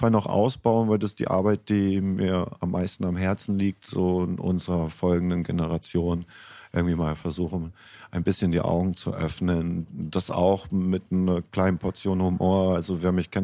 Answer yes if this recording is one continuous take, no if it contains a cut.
yes